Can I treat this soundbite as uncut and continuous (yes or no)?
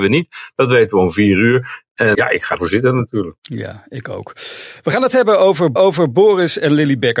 no